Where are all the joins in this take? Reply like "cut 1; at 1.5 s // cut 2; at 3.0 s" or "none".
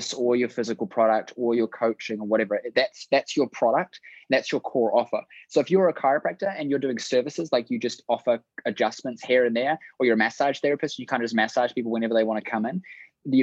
none